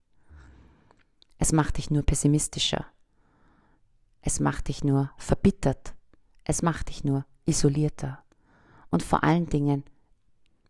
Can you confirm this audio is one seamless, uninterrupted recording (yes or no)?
yes